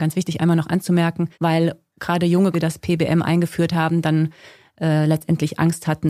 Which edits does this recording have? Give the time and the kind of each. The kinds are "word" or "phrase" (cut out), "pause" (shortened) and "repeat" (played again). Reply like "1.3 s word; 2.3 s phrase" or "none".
1.3 s pause; 2.5 s phrase